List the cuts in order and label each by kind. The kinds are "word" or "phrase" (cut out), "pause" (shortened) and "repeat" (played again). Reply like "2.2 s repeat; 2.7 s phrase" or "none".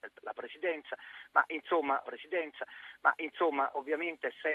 2.0 s repeat